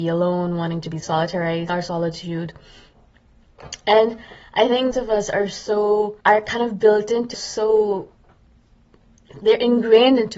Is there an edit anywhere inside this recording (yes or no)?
yes